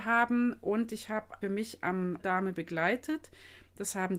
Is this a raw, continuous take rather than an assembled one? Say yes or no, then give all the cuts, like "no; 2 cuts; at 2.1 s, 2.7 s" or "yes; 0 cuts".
no; 2 cuts; at 1.4 s, 2.2 s